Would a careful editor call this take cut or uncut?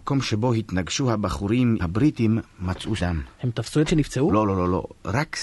cut